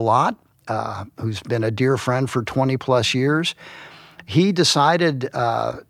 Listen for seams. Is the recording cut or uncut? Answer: uncut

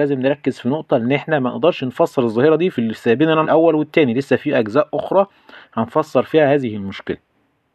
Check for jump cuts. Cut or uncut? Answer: cut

